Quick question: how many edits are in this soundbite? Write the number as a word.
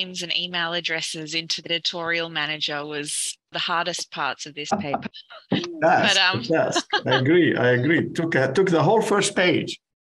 two